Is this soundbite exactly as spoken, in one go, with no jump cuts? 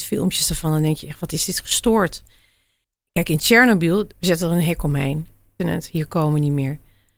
no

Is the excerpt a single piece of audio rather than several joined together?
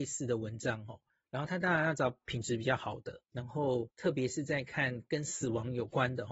no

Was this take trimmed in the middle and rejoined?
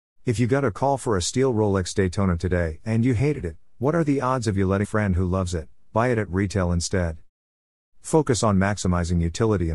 yes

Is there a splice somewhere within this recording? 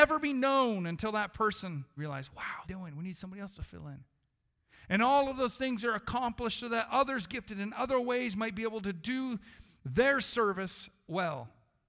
yes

